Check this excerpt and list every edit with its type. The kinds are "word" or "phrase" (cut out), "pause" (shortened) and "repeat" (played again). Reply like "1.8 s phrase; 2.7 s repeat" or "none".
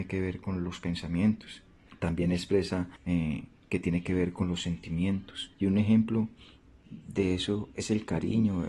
1.9 s pause; 3.0 s pause; 5.5 s pause